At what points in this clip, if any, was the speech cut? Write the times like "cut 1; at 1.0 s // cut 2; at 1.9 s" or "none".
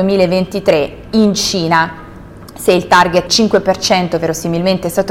cut 1; at 3.3 s

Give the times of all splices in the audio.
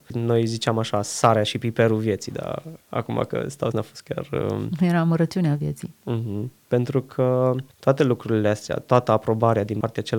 cut 1; at 3.7 s

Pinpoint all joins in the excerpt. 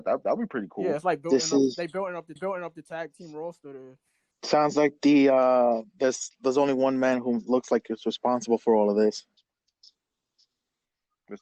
cut 1; at 2.4 s // cut 2; at 4.3 s

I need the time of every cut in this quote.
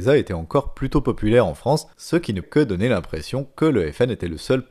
cut 1; at 1.9 s // cut 2; at 2.4 s

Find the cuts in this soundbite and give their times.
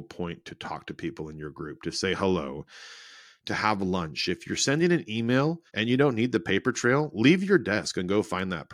cut 1; at 5.7 s

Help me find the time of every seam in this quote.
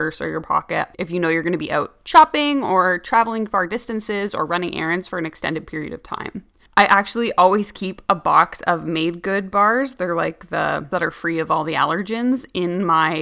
cut 1; at 10.9 s

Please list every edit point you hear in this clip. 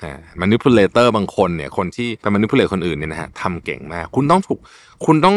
cut 1; at 2.2 s

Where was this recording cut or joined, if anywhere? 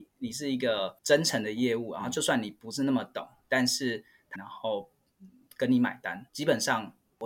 cut 1; at 1.0 s // cut 2; at 4.4 s // cut 3; at 6.3 s

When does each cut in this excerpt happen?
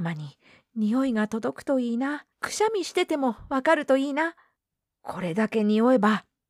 cut 1; at 2.3 s // cut 2; at 4.6 s

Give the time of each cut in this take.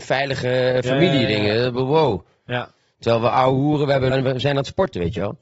cut 1; at 4.1 s

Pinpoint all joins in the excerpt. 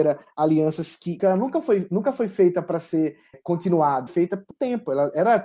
cut 1; at 1.2 s // cut 2; at 3.3 s // cut 3; at 4.1 s // cut 4; at 4.5 s

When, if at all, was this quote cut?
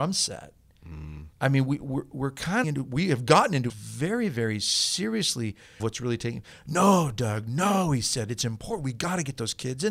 cut 1; at 1.3 s // cut 2; at 2.6 s // cut 3; at 3.7 s // cut 4; at 5.8 s

